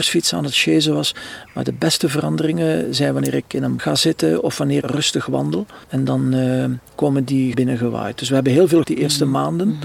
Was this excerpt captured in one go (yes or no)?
no